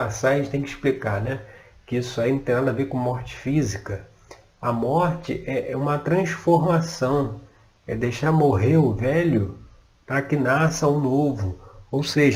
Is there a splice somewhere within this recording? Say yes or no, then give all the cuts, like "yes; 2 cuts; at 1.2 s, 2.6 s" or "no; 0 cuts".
no; 0 cuts